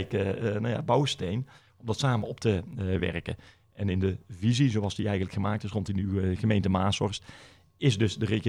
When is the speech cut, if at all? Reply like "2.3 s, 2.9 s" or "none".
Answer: none